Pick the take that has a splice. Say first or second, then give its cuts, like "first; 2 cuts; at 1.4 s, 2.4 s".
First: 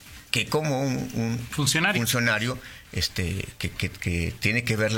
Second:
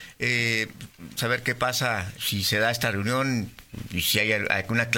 second; 3 cuts; at 1.2 s, 2.2 s, 3.9 s